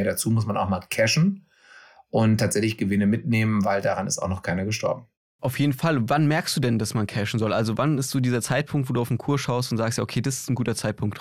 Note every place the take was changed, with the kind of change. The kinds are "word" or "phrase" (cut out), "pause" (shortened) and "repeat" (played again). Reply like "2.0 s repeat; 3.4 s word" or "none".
none

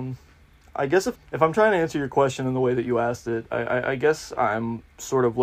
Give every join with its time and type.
1.1 s phrase

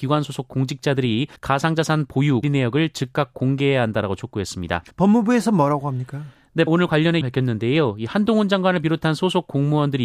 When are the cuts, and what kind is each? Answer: 1.4 s pause; 2.4 s word; 4.9 s pause; 6.7 s word; 7.2 s word

